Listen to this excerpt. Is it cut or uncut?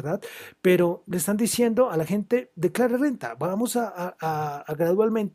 uncut